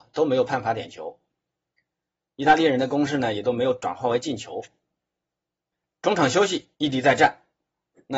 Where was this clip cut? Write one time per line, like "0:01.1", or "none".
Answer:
0:06.7